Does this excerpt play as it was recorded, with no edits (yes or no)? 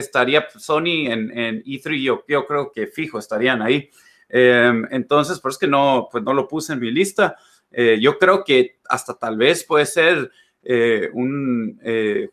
yes